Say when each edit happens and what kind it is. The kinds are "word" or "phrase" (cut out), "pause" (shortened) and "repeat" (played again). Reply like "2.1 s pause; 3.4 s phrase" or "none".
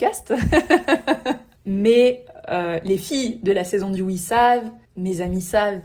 4.8 s pause